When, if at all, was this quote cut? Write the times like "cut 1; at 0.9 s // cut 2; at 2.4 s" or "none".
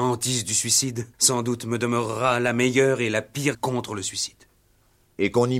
cut 1; at 1.1 s // cut 2; at 3.5 s